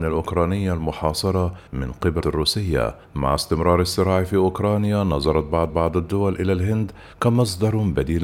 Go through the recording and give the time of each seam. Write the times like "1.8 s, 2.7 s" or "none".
1.7 s, 2.2 s, 3.0 s, 5.7 s, 7.1 s

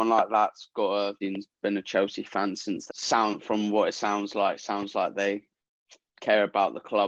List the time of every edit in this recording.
1.2 s, 2.9 s

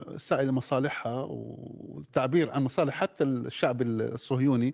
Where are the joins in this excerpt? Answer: none

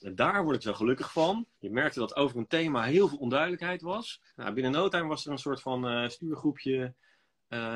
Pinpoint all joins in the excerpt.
1.5 s, 4.3 s

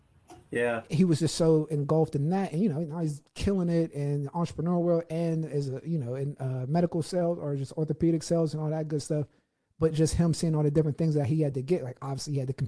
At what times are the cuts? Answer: none

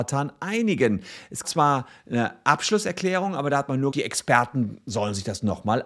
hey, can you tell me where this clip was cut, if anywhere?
1.4 s, 3.9 s

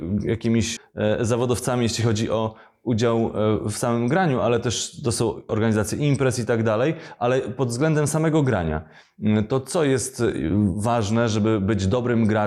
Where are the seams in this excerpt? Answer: none

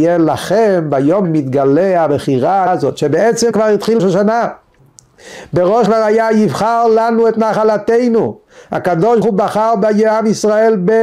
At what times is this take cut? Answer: 1.2 s, 2.7 s, 3.5 s, 4.0 s, 5.9 s, 9.2 s

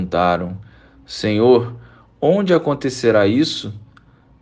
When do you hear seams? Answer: none

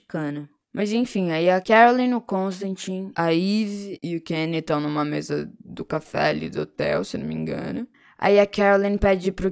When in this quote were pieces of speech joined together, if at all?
none

